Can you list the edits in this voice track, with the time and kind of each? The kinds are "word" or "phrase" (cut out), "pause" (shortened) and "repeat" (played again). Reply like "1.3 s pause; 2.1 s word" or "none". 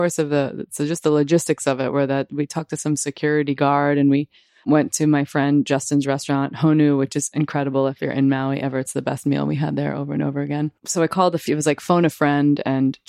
4.5 s pause; 10.8 s pause